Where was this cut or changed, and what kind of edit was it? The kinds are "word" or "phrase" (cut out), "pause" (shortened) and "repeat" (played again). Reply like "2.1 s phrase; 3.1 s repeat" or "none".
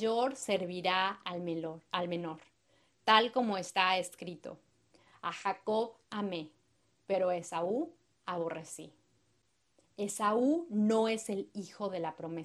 none